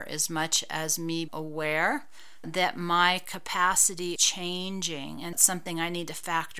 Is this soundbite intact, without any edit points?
no; 4 cuts; at 1.3 s, 2.4 s, 4.2 s, 5.3 s

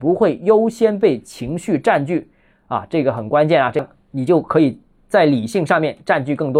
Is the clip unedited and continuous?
yes; 0 cuts

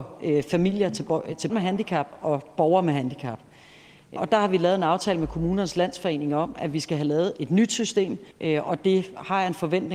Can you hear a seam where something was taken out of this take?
yes; 3 cuts; at 1.5 s, 4.2 s, 8.3 s

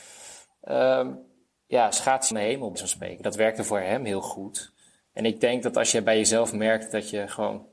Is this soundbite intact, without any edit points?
no; 3 cuts; at 1.5 s, 2.3 s, 2.7 s

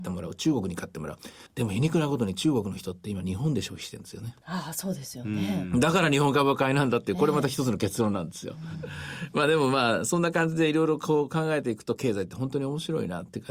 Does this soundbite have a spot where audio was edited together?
yes; 2 cuts; at 1.5 s, 4.4 s

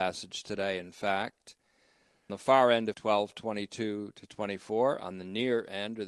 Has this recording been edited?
yes; 2 cuts; at 2.3 s, 2.9 s

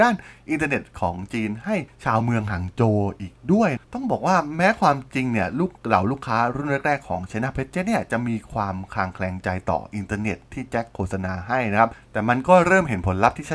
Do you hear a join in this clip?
yes; 1 cut; at 3.8 s

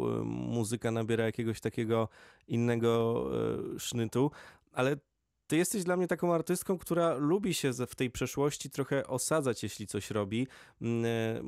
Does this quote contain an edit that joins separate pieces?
no; 0 cuts

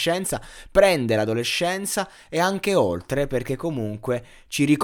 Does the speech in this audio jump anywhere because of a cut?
no; 0 cuts

